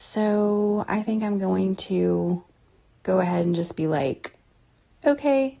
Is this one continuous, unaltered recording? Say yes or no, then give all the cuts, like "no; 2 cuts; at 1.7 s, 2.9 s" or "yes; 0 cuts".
yes; 0 cuts